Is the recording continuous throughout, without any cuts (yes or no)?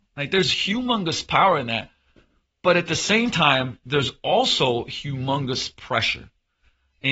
yes